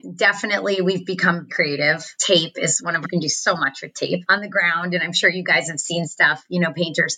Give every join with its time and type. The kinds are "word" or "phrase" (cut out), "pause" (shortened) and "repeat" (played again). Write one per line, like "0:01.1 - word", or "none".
0:01.5 - word
0:03.0 - phrase